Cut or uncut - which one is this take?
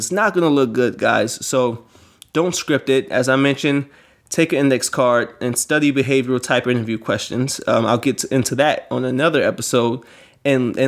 uncut